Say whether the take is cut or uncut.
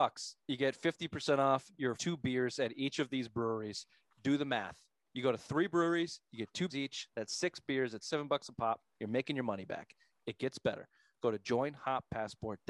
cut